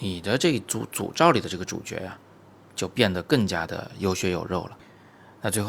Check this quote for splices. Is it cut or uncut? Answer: uncut